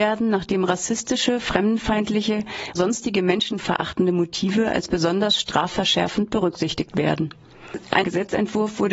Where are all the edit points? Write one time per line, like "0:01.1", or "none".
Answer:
0:02.8
0:08.0